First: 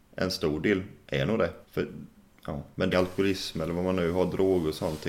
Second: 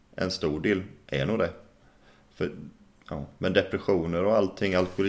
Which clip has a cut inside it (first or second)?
first